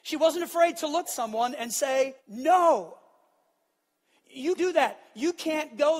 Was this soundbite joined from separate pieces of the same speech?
yes; 3 cuts; at 1.0 s, 2.2 s, 4.6 s

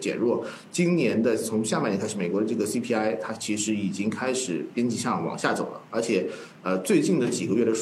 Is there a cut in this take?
no; 0 cuts

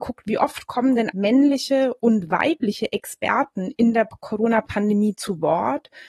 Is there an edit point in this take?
yes; 1 cut; at 1.1 s

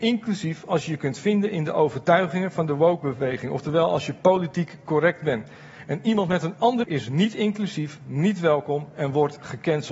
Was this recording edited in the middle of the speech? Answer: yes; 1 cut; at 6.8 s

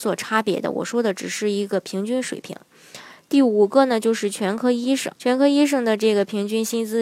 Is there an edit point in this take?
yes; 1 cut; at 5.2 s

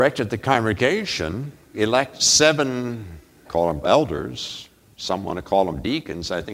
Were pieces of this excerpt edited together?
yes; 3 cuts; at 1.7 s, 3.4 s, 3.8 s

